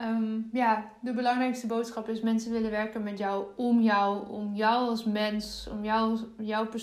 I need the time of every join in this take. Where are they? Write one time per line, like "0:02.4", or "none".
none